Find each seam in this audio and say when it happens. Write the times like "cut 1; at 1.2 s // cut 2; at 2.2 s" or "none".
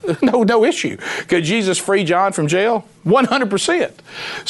none